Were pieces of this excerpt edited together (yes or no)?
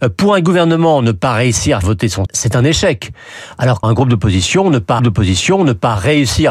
yes